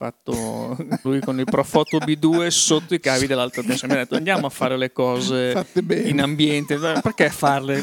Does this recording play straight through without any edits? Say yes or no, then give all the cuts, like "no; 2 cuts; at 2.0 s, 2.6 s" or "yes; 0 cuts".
no; 1 cut; at 1.0 s